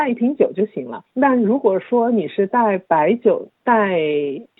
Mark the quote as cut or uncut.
cut